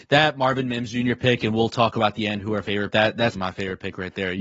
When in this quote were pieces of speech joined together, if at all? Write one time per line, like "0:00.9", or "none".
0:02.9
0:03.4